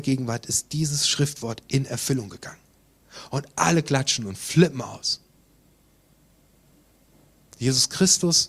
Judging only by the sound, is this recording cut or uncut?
uncut